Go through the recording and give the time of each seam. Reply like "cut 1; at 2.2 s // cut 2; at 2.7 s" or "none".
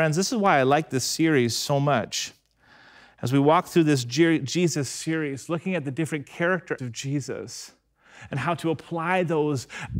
cut 1; at 6.8 s